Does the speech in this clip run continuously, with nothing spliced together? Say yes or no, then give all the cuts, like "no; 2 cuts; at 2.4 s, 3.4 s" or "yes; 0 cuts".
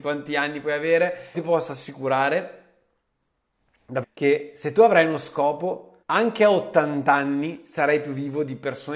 no; 3 cuts; at 1.3 s, 4.0 s, 6.0 s